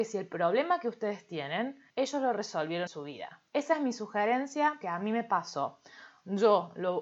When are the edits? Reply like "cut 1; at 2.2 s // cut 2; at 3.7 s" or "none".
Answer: cut 1; at 1.9 s // cut 2; at 2.9 s // cut 3; at 3.5 s // cut 4; at 4.8 s

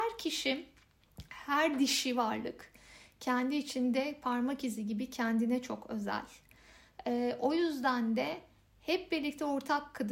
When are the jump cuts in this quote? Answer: none

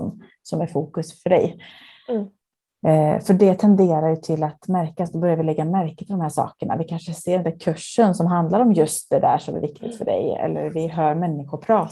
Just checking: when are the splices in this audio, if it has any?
none

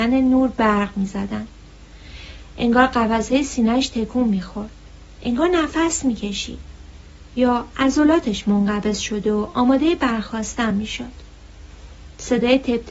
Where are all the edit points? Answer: none

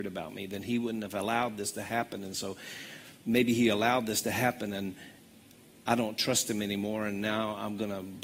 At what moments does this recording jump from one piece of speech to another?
cut 1; at 3.2 s

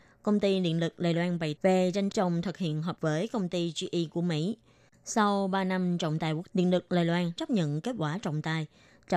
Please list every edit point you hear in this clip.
cut 1; at 1.6 s // cut 2; at 2.1 s // cut 3; at 3.0 s // cut 4; at 6.5 s // cut 5; at 7.4 s

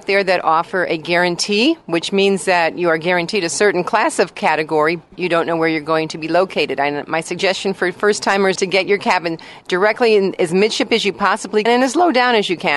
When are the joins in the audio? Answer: cut 1; at 5.2 s // cut 2; at 8.6 s // cut 3; at 11.7 s

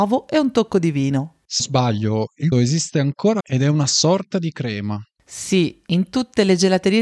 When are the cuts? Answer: cut 1; at 1.6 s // cut 2; at 2.5 s // cut 3; at 3.4 s

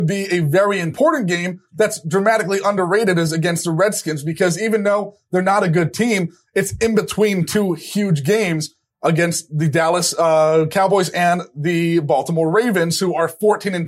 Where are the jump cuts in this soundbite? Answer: none

